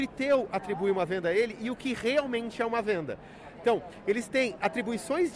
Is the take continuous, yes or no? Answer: yes